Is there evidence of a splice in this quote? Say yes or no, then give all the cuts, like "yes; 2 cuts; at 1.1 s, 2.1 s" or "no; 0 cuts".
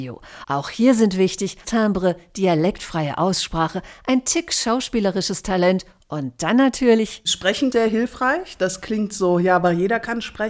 yes; 2 cuts; at 1.6 s, 7.7 s